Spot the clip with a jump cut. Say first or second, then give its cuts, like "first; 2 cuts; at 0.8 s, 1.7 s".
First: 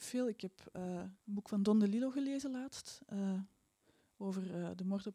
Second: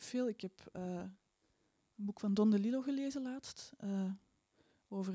first; 1 cut; at 1.2 s